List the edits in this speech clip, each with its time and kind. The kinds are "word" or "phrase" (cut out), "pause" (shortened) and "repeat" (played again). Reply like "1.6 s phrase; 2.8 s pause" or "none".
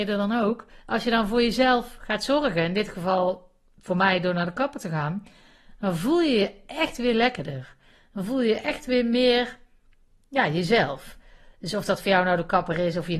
none